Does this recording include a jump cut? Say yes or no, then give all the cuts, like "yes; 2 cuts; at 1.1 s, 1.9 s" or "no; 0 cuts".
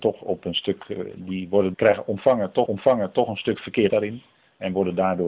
yes; 3 cuts; at 1.7 s, 2.7 s, 3.9 s